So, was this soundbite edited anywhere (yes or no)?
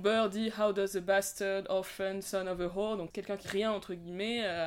yes